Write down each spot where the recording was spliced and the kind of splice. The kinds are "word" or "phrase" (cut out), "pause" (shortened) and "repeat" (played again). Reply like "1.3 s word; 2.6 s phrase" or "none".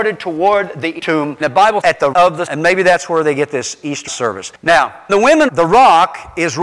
1.0 s word; 1.4 s word; 1.8 s word; 2.1 s word; 2.5 s word; 4.1 s word; 5.1 s word; 5.5 s word